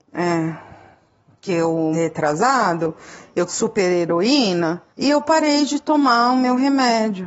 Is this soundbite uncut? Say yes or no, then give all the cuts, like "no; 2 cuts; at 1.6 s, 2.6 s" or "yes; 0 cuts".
no; 3 cuts; at 1.9 s, 3.5 s, 4.9 s